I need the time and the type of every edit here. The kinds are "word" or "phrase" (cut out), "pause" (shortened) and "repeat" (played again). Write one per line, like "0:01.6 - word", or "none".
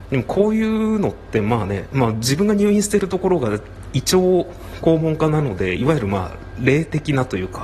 none